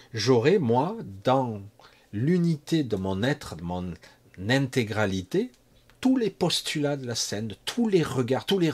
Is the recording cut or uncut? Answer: uncut